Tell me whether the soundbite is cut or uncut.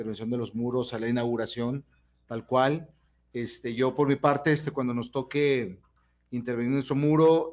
uncut